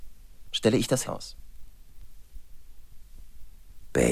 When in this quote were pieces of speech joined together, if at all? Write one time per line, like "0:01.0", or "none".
0:01.1